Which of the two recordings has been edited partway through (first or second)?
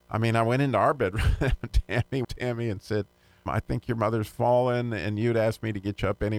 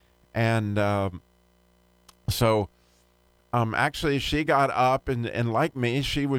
first